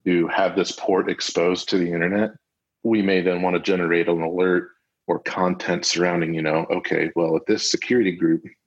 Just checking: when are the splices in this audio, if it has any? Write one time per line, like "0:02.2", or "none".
none